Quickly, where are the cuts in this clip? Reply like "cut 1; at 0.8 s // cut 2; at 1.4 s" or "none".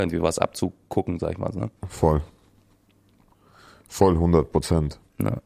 cut 1; at 1.8 s